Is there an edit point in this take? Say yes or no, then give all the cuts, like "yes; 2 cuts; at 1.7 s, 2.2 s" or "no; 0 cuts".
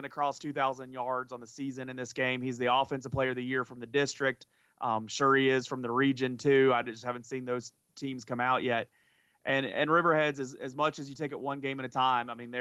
no; 0 cuts